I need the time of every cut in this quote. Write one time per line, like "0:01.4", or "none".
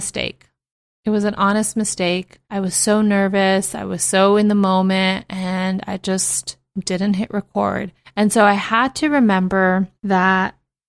0:02.4
0:08.0
0:10.0